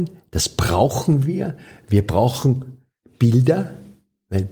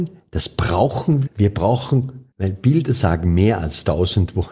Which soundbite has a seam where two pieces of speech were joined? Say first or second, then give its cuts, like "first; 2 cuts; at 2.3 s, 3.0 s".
second; 2 cuts; at 1.3 s, 2.3 s